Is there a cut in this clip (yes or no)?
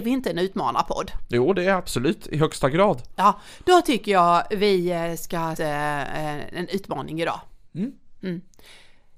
yes